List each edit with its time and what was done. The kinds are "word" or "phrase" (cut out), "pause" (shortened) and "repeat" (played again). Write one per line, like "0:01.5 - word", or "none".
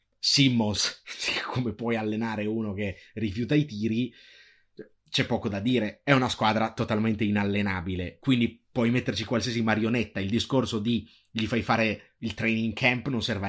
none